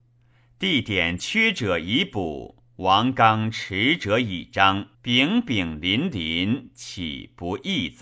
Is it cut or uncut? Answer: cut